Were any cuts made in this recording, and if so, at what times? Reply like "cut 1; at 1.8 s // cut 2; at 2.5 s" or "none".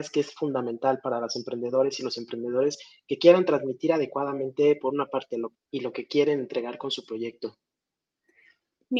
cut 1; at 5.5 s